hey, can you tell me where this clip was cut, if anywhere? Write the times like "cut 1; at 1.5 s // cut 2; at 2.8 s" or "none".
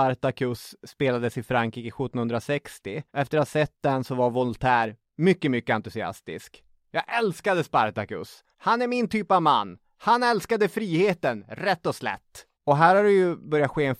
cut 1; at 3.1 s // cut 2; at 8.5 s // cut 3; at 12.5 s